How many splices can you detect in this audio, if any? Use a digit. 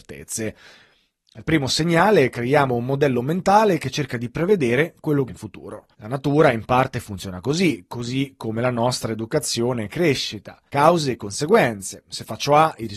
3